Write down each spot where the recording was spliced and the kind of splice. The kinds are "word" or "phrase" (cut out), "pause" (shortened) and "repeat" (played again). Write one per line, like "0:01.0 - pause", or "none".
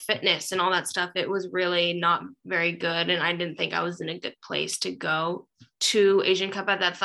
none